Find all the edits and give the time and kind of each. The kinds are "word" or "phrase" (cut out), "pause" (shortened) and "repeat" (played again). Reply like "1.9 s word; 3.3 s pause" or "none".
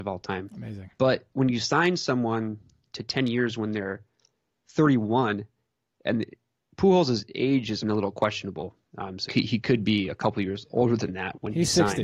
7.8 s word; 8.9 s pause; 9.3 s word